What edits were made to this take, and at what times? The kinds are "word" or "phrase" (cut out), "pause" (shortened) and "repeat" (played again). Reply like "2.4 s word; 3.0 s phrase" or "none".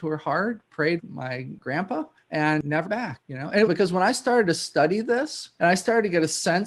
1.0 s word; 2.9 s word; 3.7 s phrase